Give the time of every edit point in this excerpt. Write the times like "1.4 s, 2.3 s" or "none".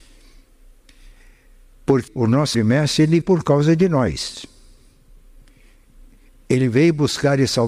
2.1 s, 2.5 s, 3.2 s